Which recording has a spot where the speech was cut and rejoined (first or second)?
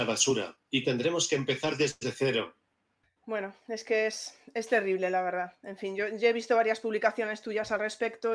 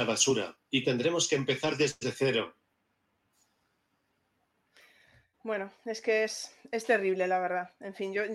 first